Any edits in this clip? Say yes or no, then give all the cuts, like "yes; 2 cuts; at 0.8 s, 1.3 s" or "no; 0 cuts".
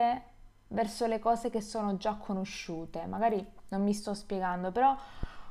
no; 0 cuts